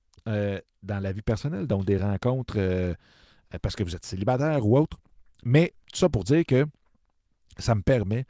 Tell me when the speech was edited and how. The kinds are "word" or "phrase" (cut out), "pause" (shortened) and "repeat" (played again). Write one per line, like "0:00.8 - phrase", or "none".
none